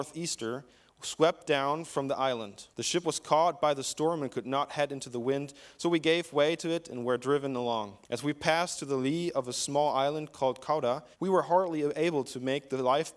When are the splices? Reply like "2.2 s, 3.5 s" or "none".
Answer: 2.7 s, 8.0 s, 11.1 s